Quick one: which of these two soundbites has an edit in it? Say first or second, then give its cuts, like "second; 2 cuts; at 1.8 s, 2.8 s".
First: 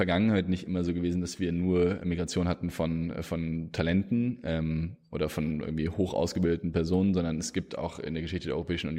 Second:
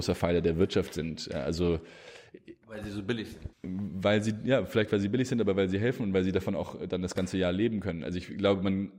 second; 1 cut; at 3.5 s